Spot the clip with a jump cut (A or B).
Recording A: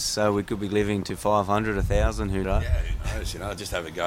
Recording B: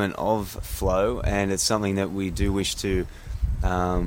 A